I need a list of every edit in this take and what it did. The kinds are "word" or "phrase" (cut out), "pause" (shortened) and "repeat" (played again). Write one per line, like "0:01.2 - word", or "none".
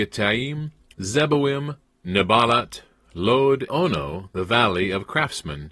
0:00.9 - word
0:03.7 - word